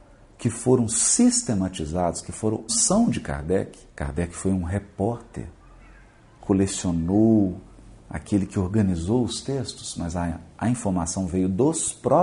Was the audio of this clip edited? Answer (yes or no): yes